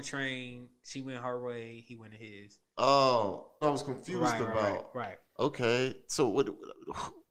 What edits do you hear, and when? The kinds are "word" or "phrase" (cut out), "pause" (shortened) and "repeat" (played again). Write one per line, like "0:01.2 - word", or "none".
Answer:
0:03.6 - phrase
0:05.3 - pause